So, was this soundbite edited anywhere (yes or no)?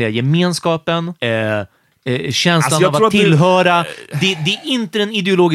yes